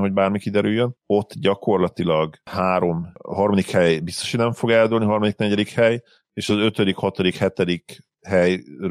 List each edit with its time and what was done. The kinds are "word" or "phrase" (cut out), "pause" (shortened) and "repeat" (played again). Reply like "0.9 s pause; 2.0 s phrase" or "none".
none